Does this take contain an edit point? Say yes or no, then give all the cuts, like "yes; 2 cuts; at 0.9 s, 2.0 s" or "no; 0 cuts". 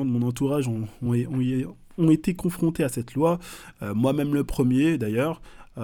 no; 0 cuts